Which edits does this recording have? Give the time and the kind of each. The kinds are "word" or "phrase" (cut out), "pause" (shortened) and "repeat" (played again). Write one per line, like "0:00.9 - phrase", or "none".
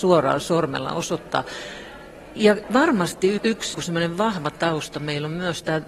0:03.4 - word
0:03.7 - word